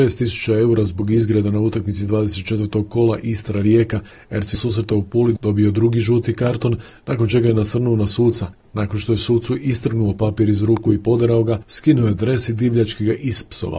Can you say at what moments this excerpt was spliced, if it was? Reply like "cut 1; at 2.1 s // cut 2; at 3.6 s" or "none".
cut 1; at 4.5 s